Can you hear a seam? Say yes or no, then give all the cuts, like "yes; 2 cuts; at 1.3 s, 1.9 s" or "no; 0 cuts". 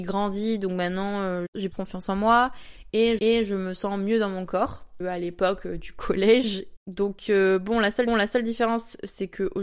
yes; 4 cuts; at 1.7 s, 3.2 s, 5.0 s, 8.1 s